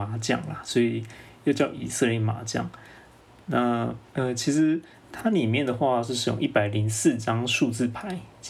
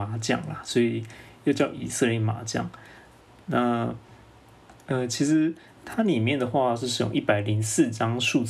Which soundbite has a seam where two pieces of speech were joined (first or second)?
first